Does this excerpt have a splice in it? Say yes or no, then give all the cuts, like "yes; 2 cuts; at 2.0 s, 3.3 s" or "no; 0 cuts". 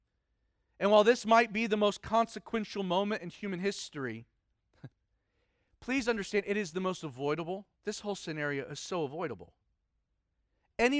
yes; 2 cuts; at 4.9 s, 7.7 s